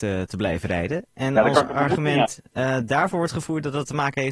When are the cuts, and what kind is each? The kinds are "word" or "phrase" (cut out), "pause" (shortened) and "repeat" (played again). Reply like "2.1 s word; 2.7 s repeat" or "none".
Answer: none